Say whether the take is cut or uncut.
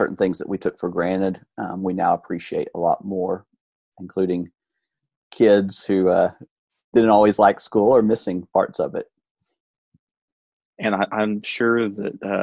uncut